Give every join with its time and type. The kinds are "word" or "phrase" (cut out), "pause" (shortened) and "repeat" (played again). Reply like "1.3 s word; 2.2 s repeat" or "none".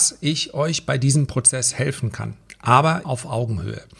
3.0 s word